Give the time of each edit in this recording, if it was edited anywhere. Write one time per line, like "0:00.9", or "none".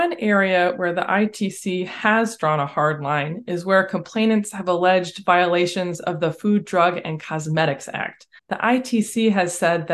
0:08.4